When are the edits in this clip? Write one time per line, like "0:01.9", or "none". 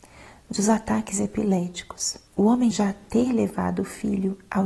0:02.3
0:02.7